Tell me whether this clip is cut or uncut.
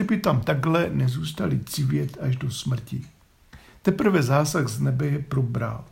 uncut